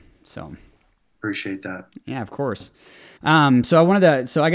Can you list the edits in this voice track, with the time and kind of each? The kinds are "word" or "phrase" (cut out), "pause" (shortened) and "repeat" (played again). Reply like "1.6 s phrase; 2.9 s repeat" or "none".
3.2 s pause